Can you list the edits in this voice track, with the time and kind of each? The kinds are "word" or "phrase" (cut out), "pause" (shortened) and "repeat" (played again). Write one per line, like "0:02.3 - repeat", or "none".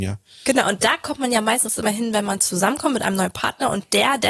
none